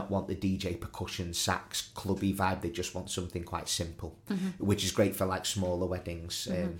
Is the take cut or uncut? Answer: uncut